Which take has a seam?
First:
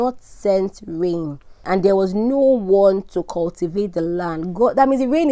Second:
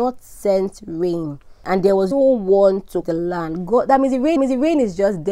second; 3 cuts; at 2.1 s, 3.0 s, 4.4 s

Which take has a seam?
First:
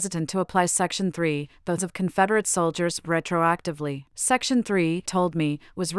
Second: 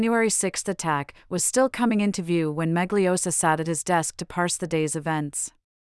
first; 4 cuts; at 1.8 s, 3.0 s, 4.1 s, 5.1 s

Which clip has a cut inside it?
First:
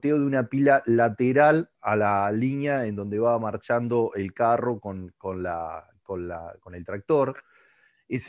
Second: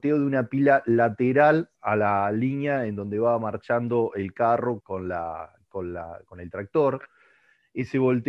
second; 1 cut; at 4.8 s

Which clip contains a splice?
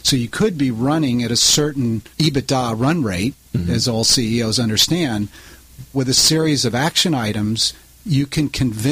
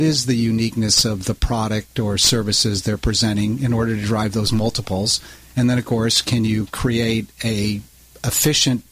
first; 2 cuts; at 2.1 s, 5.9 s

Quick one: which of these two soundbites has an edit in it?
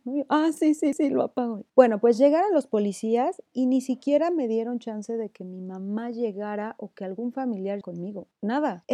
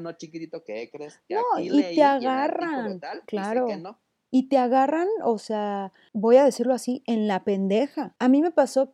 first; 4 cuts; at 0.9 s, 1.7 s, 3.5 s, 7.8 s

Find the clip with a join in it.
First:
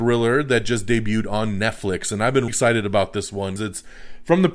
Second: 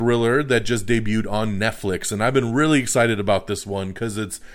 first; 2 cuts; at 2.5 s, 3.6 s

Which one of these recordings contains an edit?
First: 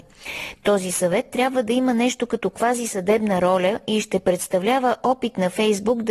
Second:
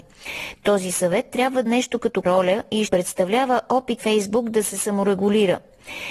second; 4 cuts; at 1.7 s, 2.2 s, 2.9 s, 4.0 s

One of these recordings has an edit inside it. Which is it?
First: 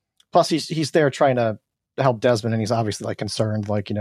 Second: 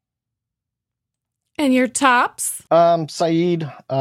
second; 1 cut; at 2.7 s

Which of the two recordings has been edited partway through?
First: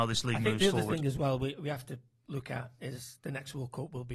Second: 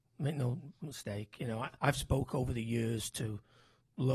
second; 1 cut; at 1.8 s

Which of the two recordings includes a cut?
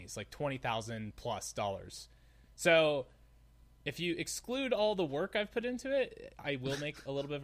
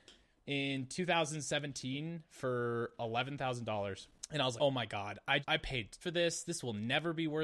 second; 3 cuts; at 4.6 s, 5.4 s, 6.0 s

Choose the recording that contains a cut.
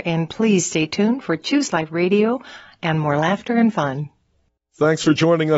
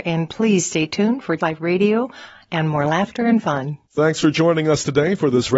second; 2 cuts; at 1.4 s, 3.9 s

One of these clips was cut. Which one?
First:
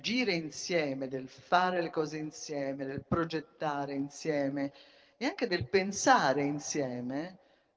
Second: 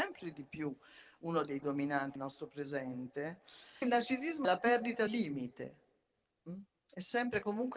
second; 5 cuts; at 1.6 s, 2.2 s, 3.8 s, 4.4 s, 5.1 s

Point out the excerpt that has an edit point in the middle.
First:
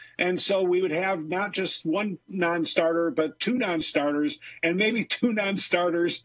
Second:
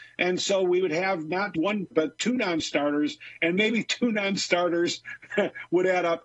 second; 2 cuts; at 1.5 s, 1.9 s

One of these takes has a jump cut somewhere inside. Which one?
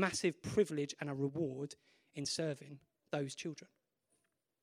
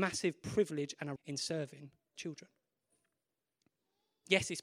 second; 2 cuts; at 1.2 s, 2.2 s

